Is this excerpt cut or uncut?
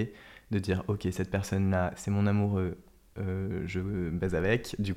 uncut